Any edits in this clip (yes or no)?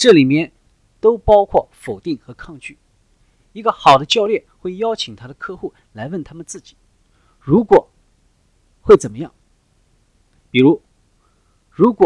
no